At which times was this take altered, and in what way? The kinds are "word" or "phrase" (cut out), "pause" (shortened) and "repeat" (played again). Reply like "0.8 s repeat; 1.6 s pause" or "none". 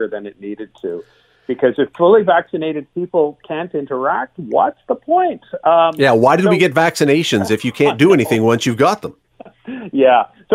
none